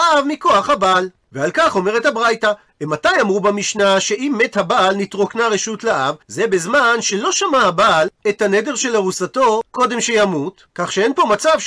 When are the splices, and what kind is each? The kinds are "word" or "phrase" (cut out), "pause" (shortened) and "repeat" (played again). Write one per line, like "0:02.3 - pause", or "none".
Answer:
0:06.2 - pause
0:09.7 - pause